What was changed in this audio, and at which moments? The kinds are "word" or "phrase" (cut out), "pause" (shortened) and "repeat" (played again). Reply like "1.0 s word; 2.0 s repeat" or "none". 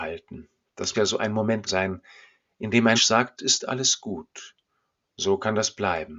0.9 s word; 1.7 s word; 3.0 s word; 3.4 s word